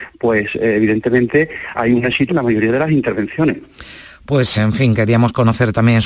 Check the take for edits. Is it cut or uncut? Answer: cut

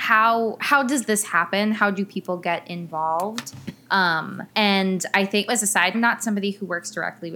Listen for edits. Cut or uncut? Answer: cut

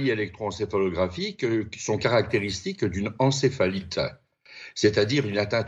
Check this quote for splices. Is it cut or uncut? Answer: uncut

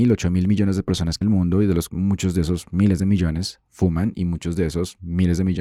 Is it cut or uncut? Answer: cut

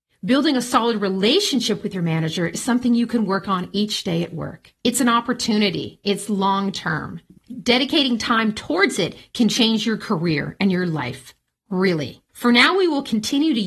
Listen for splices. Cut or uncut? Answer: cut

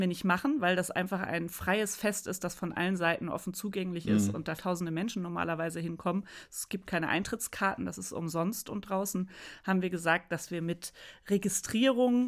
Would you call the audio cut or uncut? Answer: cut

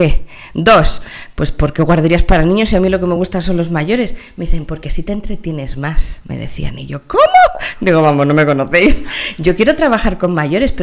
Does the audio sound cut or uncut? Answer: uncut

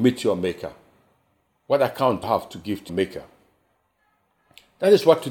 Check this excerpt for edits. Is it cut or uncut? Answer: cut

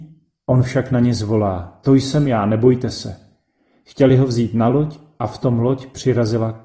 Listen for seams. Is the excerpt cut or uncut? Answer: uncut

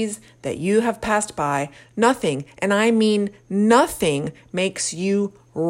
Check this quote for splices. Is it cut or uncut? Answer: uncut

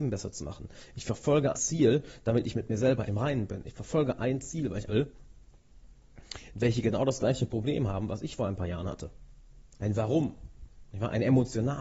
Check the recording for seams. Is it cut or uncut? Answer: cut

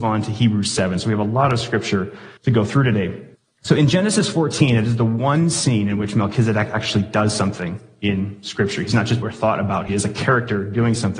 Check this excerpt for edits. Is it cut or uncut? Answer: cut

